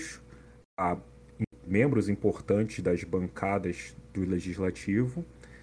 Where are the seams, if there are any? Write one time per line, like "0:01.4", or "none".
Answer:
0:01.7